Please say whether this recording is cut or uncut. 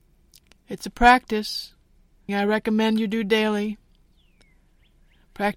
cut